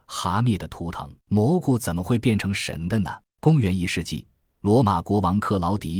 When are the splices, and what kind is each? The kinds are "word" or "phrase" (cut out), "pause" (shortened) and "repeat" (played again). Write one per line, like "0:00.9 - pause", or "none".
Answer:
0:01.2 - pause
0:03.3 - pause